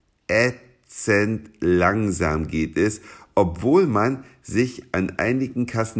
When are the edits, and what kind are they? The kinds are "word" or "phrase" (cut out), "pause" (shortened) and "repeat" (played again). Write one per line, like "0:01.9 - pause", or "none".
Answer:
none